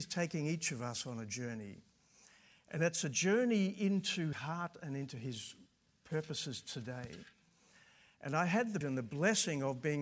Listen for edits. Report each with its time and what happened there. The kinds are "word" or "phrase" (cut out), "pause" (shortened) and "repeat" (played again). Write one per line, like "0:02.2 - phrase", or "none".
0:04.3 - word
0:08.8 - word